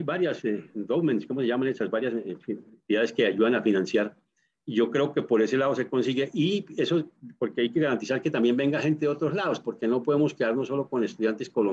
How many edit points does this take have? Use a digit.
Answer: 0